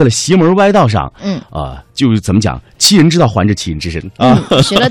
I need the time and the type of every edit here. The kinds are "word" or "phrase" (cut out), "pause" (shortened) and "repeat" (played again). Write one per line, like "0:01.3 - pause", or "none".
0:01.9 - pause